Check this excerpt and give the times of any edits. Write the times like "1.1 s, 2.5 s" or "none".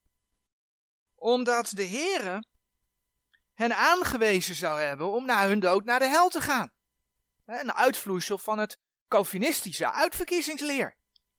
none

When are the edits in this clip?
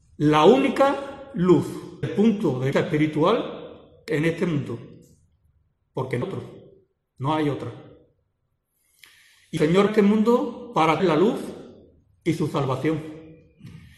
2.0 s, 2.7 s, 4.1 s, 6.2 s, 9.6 s, 9.9 s, 11.0 s

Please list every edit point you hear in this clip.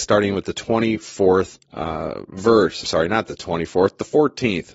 1.7 s, 2.8 s

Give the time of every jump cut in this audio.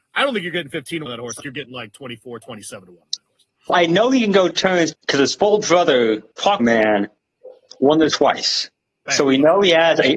1.1 s, 1.4 s, 3.7 s, 4.5 s, 4.9 s, 6.6 s, 8.1 s

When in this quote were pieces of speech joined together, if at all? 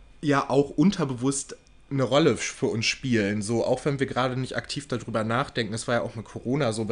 none

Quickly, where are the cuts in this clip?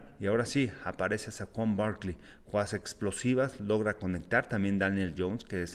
none

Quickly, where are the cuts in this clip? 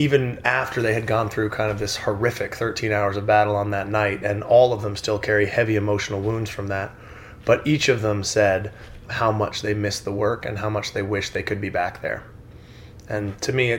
9.1 s

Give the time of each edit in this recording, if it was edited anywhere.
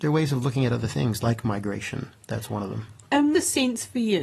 3.3 s

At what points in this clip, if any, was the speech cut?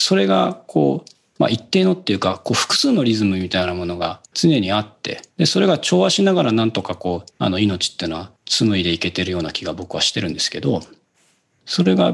4.3 s, 5.3 s, 7.3 s, 8.4 s

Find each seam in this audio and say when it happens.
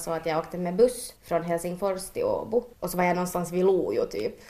1.2 s, 2.7 s

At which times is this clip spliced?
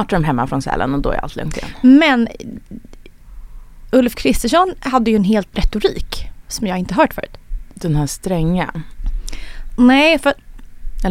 5.5 s

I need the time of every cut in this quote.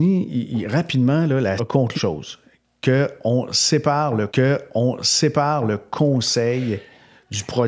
1.6 s, 1.9 s, 4.3 s

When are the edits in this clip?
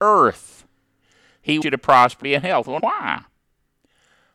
1.6 s, 2.2 s, 2.8 s

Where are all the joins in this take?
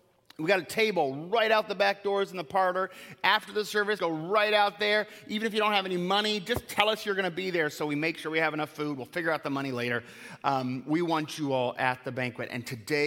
4.0 s

